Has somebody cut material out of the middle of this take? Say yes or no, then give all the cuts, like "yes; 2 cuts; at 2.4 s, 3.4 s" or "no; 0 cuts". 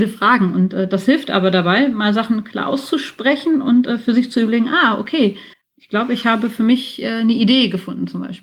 yes; 1 cut; at 5.5 s